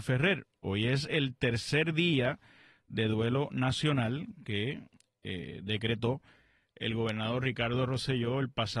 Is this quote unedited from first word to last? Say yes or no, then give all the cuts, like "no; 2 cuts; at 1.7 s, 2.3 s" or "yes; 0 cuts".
yes; 0 cuts